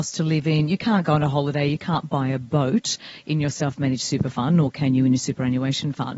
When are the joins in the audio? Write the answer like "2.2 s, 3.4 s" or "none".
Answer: none